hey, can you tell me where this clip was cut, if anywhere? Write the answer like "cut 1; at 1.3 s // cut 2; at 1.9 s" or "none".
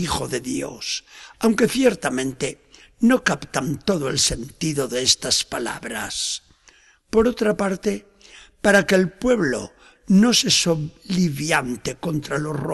none